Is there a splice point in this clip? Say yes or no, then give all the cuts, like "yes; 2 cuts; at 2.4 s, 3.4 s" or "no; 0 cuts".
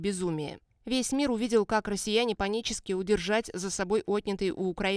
yes; 1 cut; at 2.4 s